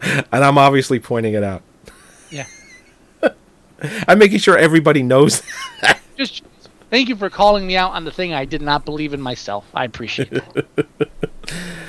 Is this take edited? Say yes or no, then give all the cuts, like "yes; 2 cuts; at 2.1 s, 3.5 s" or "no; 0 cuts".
no; 0 cuts